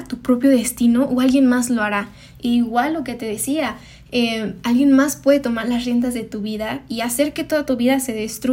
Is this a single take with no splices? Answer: yes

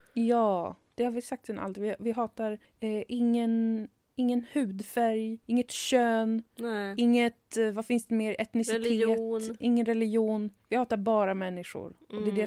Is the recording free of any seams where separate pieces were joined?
no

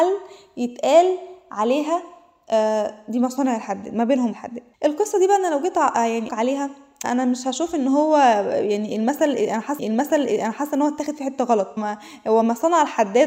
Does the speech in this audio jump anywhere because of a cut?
yes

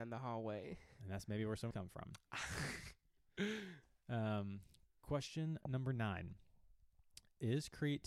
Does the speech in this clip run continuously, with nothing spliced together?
no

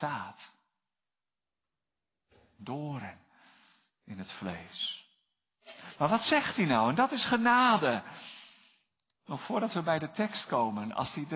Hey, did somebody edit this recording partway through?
no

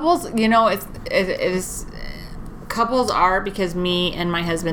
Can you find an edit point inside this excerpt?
no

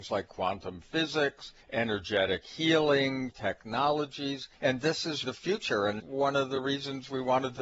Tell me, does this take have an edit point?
yes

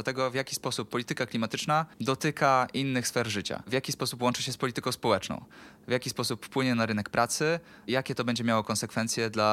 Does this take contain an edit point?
yes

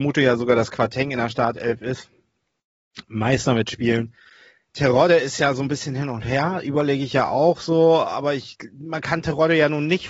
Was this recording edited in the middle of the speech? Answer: no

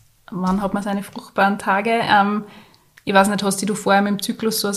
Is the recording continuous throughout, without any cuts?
yes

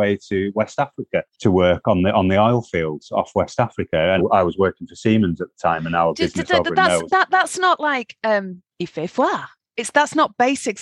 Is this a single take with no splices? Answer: no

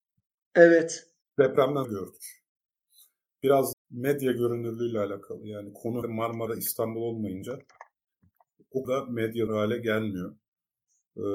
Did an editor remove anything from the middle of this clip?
yes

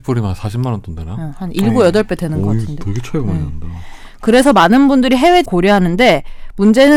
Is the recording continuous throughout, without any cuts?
no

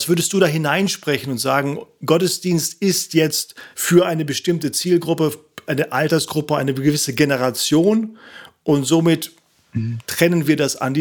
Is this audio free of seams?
no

